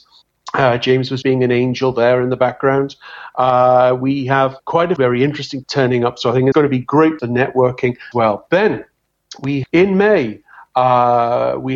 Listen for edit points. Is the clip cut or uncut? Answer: cut